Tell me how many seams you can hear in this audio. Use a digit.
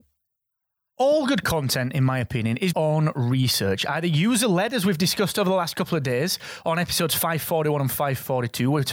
1